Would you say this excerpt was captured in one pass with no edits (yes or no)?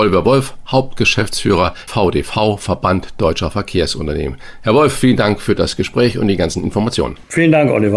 no